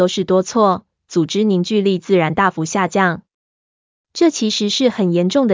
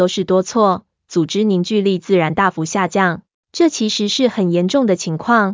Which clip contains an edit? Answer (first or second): second